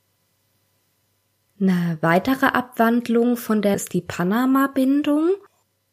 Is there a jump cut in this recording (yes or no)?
yes